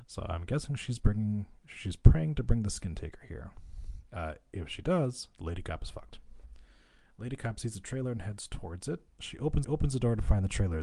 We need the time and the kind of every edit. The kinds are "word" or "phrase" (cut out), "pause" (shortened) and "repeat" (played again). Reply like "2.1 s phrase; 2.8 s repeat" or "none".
9.6 s repeat